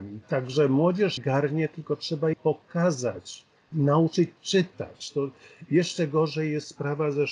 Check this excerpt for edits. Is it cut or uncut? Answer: cut